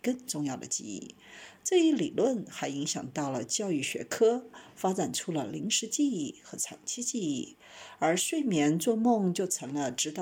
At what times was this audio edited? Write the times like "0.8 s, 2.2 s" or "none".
none